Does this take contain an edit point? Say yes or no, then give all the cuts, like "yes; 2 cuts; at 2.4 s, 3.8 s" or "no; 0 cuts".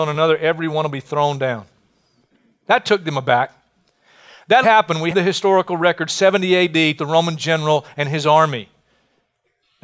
yes; 3 cuts; at 4.6 s, 5.1 s, 7.0 s